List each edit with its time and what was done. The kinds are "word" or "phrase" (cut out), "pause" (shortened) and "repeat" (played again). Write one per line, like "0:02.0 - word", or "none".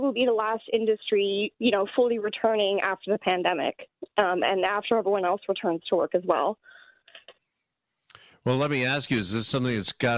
none